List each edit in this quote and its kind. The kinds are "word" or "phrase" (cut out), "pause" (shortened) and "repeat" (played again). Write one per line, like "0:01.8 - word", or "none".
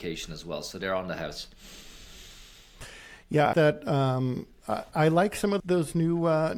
0:03.5 - word
0:05.6 - word